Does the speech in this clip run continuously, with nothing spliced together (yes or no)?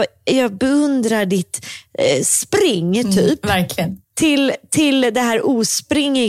no